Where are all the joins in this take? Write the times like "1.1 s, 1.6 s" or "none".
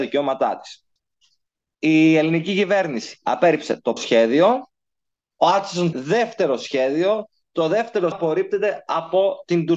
4.0 s, 5.9 s, 8.1 s